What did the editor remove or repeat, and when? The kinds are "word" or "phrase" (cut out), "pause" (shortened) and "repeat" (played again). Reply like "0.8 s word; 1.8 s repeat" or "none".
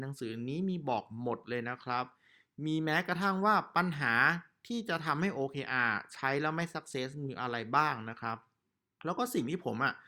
none

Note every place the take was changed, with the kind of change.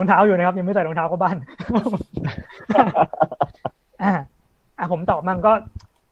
none

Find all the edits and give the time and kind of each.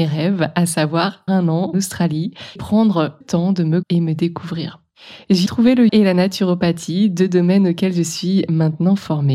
1.3 s word; 1.7 s word; 2.6 s word; 3.2 s word; 3.8 s word; 5.5 s word; 5.9 s word

